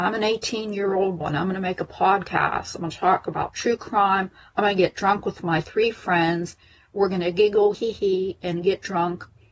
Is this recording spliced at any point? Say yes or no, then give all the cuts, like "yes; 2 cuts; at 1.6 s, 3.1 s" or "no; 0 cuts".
yes; 2 cuts; at 1.2 s, 7.7 s